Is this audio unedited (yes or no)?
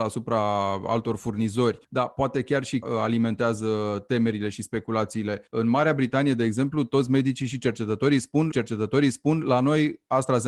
no